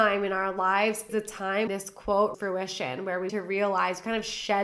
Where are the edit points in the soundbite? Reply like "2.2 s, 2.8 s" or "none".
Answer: 1.1 s, 1.7 s, 2.3 s, 3.3 s